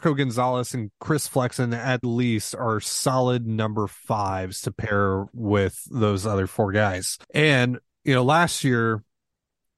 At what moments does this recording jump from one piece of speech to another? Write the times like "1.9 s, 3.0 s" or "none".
2.0 s, 7.2 s